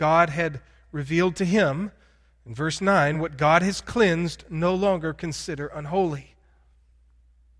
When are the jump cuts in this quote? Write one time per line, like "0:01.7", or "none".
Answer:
none